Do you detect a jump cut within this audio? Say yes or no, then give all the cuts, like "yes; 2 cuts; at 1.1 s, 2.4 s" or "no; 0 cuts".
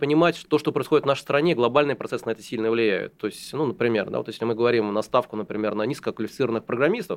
no; 0 cuts